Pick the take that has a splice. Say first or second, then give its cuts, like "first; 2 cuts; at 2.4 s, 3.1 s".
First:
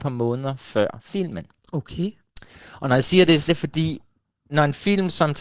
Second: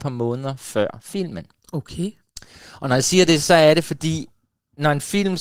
first; 1 cut; at 3.5 s